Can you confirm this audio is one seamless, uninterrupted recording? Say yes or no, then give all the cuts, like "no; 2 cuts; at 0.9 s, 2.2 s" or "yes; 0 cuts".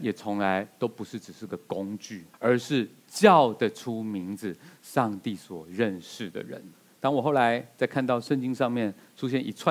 no; 2 cuts; at 2.3 s, 6.7 s